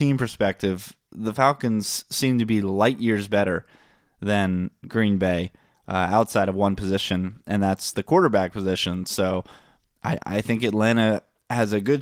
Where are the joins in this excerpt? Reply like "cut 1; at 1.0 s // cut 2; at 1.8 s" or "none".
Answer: none